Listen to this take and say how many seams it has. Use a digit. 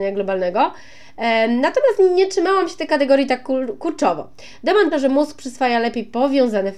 1